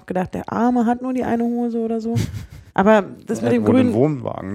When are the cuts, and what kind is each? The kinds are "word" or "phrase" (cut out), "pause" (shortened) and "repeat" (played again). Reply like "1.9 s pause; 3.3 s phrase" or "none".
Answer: 2.7 s pause